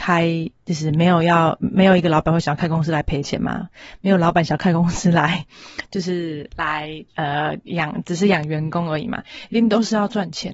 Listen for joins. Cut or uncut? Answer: cut